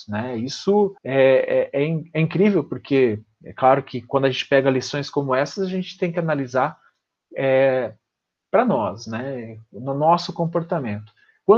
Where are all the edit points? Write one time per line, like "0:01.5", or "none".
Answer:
0:01.0